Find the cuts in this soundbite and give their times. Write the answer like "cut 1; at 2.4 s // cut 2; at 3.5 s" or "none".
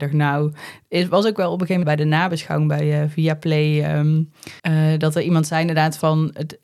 cut 1; at 1.8 s // cut 2; at 4.6 s